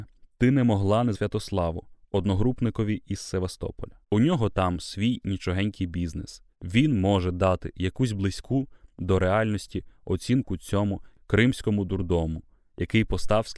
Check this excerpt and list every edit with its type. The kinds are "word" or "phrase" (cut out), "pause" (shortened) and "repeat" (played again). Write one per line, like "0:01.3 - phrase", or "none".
0:01.1 - word
0:04.0 - pause
0:06.5 - pause